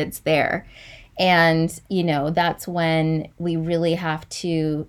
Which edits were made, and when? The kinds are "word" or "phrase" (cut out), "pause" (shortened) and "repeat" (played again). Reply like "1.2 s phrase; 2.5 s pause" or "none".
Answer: 1.8 s pause